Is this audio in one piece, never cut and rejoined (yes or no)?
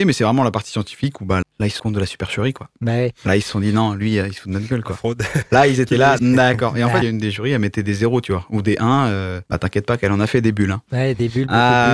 no